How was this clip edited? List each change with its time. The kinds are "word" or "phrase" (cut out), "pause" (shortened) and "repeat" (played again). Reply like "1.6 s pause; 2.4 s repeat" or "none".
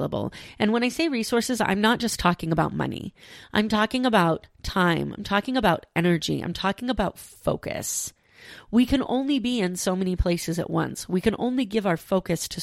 none